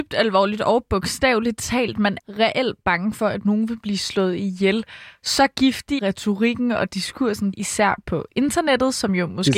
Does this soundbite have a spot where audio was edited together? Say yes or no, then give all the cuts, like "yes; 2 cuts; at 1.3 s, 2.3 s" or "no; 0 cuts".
yes; 3 cuts; at 2.2 s, 6.0 s, 7.5 s